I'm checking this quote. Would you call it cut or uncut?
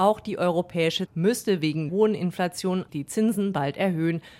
cut